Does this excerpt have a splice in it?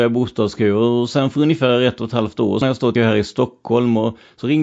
yes; 2 cuts; at 2.6 s, 3.0 s

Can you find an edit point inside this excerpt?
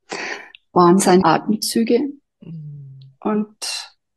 yes; 1 cut; at 1.2 s

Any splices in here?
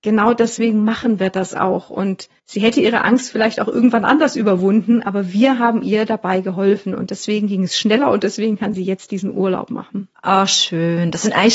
yes; 1 cut; at 2.4 s

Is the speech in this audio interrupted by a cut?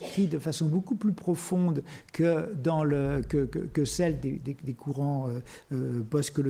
no; 0 cuts

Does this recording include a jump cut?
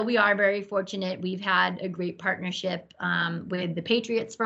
no; 0 cuts

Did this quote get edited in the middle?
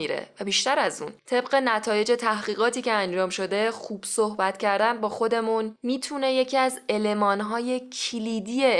no; 0 cuts

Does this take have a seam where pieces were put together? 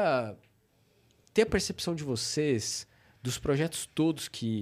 no; 0 cuts

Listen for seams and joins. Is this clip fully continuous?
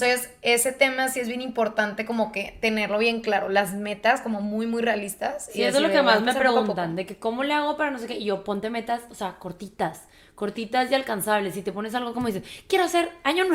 yes; 0 cuts

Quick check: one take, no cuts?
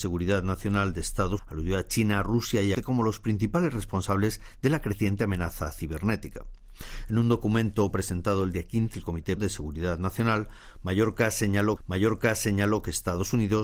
no; 5 cuts; at 1.4 s, 2.7 s, 8.9 s, 9.4 s, 11.8 s

